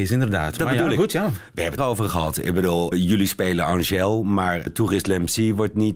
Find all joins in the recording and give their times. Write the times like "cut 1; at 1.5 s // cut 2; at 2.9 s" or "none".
cut 1; at 1.8 s // cut 2; at 2.9 s // cut 3; at 4.7 s